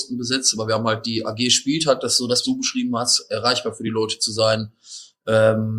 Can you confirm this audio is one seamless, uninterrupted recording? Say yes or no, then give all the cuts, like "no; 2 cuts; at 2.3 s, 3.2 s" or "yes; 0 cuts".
no; 1 cut; at 2.4 s